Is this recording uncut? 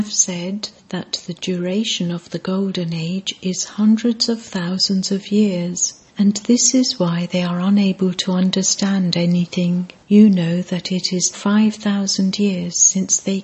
no; 3 cuts; at 6.1 s, 10.0 s, 11.3 s

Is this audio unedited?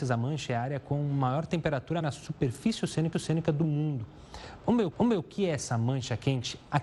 no; 3 cuts; at 2.0 s, 3.1 s, 4.9 s

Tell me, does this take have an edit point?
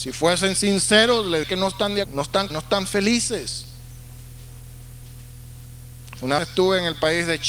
yes; 4 cuts; at 1.4 s, 2.0 s, 2.5 s, 6.4 s

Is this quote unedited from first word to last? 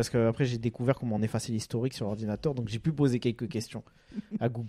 yes; 0 cuts

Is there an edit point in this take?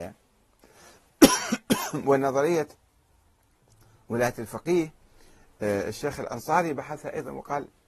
no; 0 cuts

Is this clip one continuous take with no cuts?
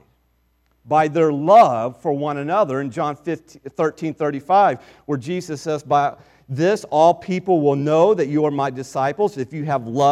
yes; 0 cuts

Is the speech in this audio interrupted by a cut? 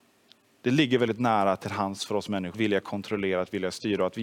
yes; 1 cut; at 2.5 s

